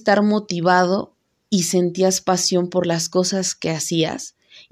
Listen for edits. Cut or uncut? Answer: uncut